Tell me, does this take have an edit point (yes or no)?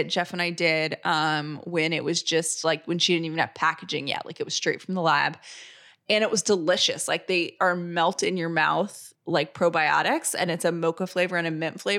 yes